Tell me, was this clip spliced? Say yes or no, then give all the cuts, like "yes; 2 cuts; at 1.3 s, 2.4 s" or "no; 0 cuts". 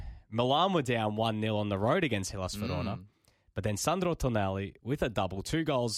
no; 0 cuts